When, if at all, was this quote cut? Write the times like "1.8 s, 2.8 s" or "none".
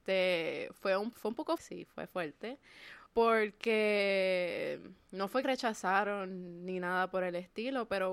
1.1 s, 1.6 s, 3.1 s, 5.4 s